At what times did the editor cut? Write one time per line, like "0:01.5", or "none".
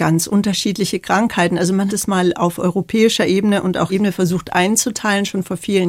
0:01.9
0:03.9